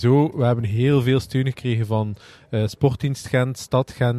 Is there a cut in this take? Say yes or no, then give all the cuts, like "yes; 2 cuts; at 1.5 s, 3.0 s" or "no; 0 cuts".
no; 0 cuts